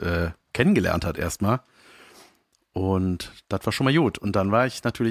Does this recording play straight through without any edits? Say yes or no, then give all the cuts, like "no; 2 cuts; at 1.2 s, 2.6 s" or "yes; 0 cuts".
yes; 0 cuts